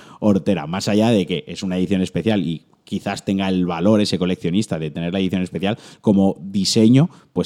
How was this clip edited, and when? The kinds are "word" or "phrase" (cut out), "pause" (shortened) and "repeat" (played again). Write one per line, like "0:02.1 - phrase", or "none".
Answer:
none